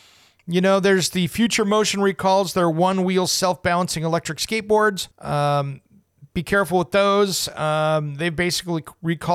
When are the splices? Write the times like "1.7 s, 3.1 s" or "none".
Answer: 5.1 s